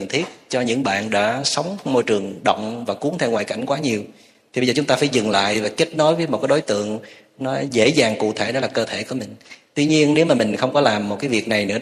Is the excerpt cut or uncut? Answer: uncut